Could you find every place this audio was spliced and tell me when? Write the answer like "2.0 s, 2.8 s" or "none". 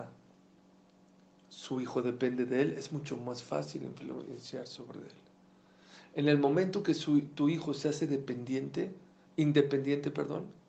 none